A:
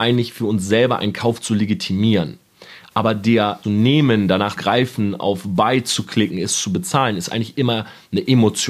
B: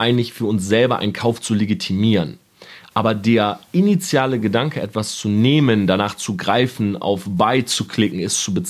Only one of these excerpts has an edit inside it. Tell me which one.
A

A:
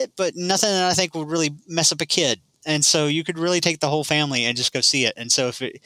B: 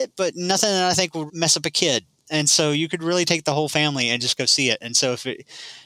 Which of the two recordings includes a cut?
B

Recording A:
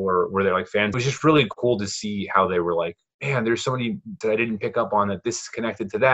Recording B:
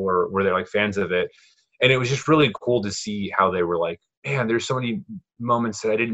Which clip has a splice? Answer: A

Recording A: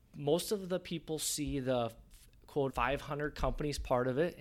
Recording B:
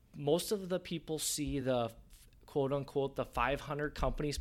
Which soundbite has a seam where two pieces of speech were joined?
A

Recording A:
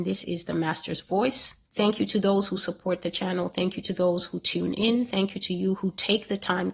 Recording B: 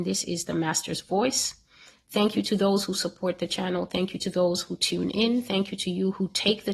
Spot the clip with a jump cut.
A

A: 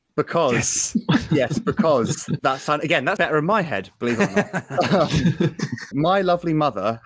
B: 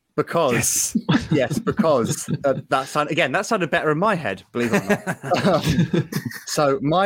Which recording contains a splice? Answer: A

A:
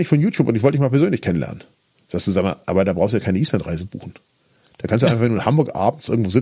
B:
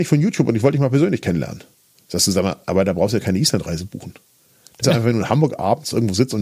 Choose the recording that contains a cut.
B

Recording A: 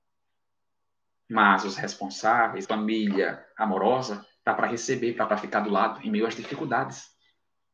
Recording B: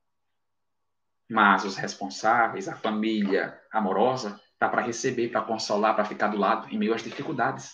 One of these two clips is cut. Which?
A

